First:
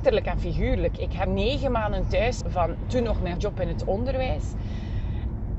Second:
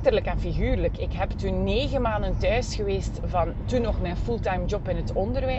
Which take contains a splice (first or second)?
first